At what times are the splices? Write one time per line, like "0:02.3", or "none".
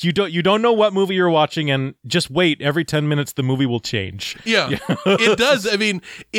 none